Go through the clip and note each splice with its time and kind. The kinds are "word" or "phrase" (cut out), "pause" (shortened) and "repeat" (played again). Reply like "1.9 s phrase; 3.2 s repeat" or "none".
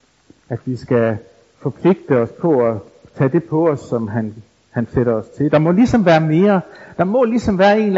none